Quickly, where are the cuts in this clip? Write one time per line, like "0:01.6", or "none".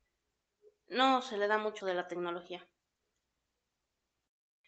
0:01.8

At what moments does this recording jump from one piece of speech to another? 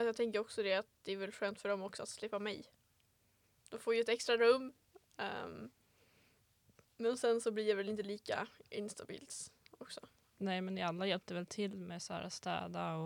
none

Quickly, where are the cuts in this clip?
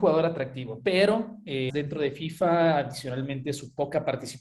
0:01.7

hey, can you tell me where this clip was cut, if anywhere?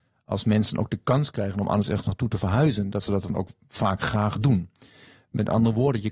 none

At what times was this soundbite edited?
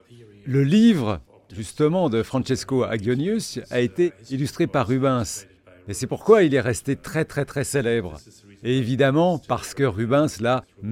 none

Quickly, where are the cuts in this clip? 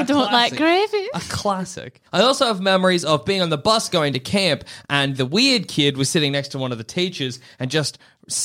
0:02.1

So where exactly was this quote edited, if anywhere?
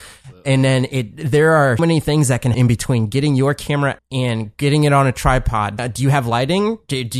0:01.8
0:02.5
0:04.0
0:05.8

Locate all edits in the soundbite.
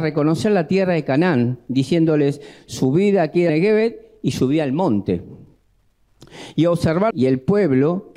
0:03.5
0:07.1

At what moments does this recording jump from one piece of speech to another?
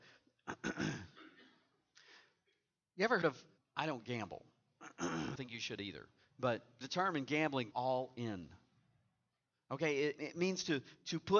0:03.2
0:03.6
0:05.4
0:06.8
0:07.7
0:10.2

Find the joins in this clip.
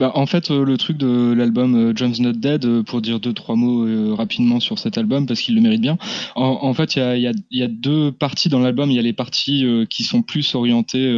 none

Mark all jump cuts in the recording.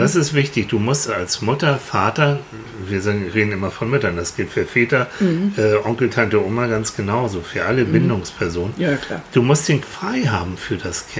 0:01.1
0:09.8

